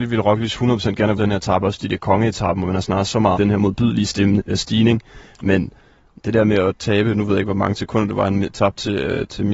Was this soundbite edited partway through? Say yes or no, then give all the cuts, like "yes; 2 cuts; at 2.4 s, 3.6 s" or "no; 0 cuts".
yes; 2 cuts; at 1.2 s, 3.3 s